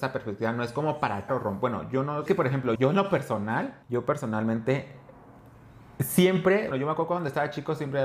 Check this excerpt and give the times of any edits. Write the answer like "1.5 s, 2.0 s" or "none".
1.3 s, 2.3 s, 2.7 s, 3.8 s, 6.7 s